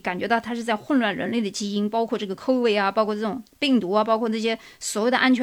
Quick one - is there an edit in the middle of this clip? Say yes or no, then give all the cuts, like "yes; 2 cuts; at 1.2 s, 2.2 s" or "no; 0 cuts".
no; 0 cuts